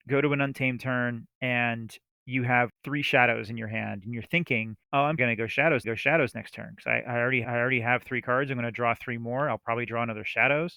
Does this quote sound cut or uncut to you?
cut